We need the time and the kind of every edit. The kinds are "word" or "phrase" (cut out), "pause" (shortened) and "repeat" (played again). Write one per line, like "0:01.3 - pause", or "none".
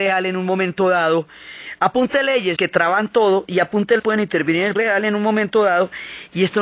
0:02.6 - phrase
0:04.0 - word
0:04.8 - word